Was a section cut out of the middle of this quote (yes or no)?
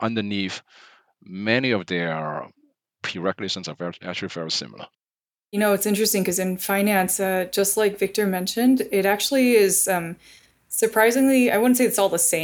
no